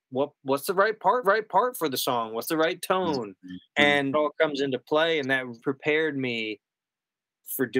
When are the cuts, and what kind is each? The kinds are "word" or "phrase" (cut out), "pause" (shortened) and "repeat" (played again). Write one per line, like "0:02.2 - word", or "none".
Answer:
0:01.2 - repeat
0:03.7 - pause
0:04.1 - word
0:05.6 - word